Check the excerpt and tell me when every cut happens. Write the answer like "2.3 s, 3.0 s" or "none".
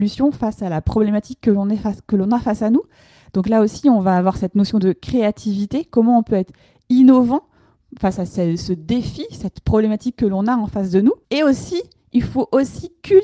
11.2 s